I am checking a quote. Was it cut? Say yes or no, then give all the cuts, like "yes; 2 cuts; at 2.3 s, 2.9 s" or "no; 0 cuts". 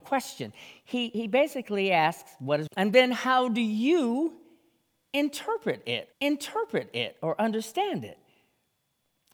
yes; 2 cuts; at 2.7 s, 6.1 s